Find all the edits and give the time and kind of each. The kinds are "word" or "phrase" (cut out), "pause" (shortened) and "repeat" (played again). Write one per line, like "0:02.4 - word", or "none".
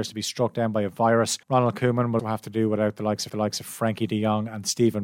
0:01.4 - pause
0:02.2 - word
0:03.3 - repeat